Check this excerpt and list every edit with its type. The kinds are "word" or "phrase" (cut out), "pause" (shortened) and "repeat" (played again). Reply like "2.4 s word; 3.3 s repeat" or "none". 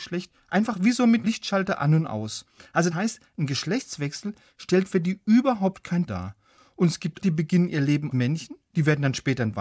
1.2 s word; 2.9 s word; 6.1 s word; 7.2 s word; 8.1 s word